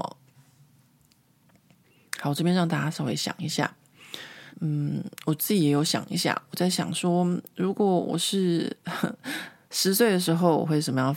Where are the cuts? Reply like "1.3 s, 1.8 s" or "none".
4.5 s